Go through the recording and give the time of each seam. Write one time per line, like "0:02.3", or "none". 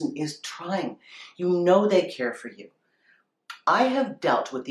none